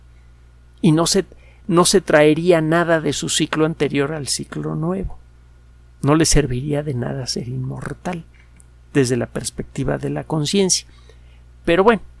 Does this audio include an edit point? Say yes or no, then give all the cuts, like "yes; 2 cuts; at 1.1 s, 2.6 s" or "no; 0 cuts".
no; 0 cuts